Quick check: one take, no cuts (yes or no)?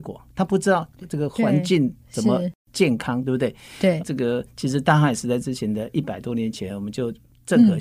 no